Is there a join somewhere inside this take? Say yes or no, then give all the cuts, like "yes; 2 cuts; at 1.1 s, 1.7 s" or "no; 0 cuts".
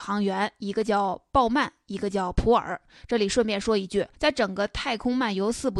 yes; 1 cut; at 4.1 s